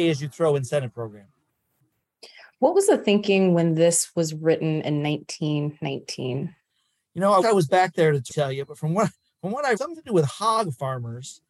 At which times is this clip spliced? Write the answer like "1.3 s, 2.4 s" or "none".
7.4 s, 8.3 s, 9.8 s